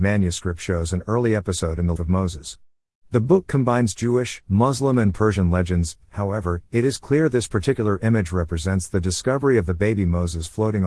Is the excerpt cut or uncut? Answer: cut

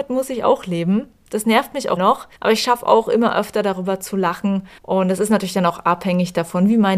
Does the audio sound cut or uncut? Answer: cut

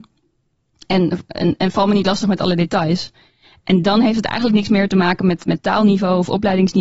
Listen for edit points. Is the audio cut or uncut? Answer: uncut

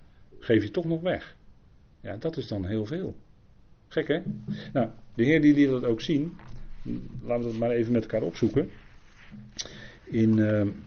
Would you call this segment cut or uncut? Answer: uncut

